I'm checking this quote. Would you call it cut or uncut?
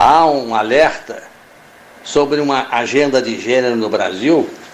uncut